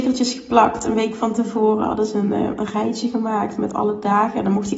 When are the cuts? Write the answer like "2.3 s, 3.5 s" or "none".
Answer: none